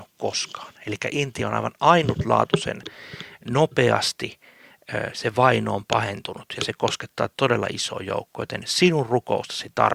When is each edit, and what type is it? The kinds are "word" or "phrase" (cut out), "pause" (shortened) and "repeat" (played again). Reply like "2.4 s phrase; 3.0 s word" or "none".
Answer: none